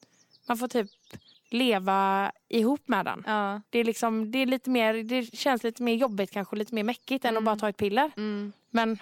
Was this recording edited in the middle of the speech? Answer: yes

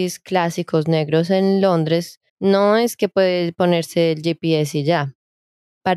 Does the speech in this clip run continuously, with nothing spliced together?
no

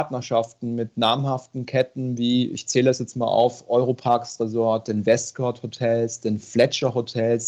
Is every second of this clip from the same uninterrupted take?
yes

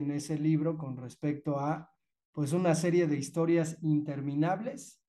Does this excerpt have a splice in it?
no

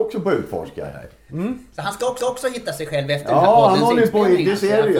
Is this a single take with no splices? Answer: no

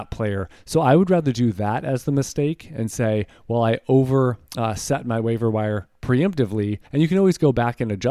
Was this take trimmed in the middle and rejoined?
yes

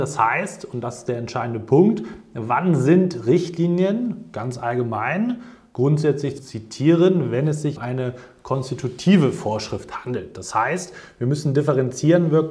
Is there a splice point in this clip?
yes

